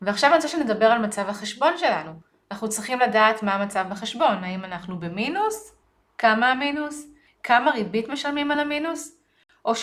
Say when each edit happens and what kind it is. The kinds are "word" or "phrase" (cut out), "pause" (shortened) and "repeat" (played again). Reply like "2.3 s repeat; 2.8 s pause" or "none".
none